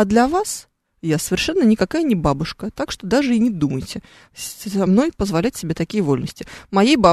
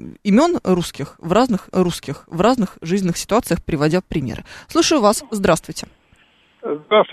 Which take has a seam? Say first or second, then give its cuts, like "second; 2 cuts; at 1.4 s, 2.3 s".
second; 1 cut; at 1.7 s